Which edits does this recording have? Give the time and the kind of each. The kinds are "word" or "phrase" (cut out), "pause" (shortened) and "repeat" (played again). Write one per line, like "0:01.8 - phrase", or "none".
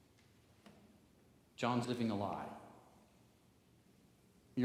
0:01.8 - phrase